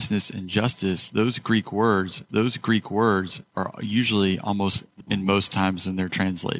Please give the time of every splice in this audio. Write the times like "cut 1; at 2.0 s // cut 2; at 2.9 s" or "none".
cut 1; at 2.3 s // cut 2; at 5.0 s